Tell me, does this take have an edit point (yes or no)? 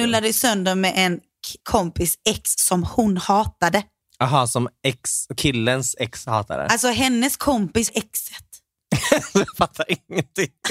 yes